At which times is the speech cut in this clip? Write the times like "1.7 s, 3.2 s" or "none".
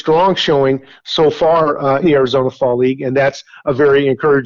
2.0 s